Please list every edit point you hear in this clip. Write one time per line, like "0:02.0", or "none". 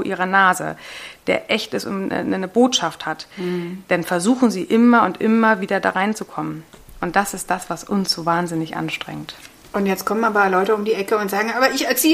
none